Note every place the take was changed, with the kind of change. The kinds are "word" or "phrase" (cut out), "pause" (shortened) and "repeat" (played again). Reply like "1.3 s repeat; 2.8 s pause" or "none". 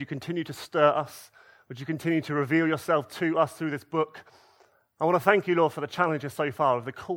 none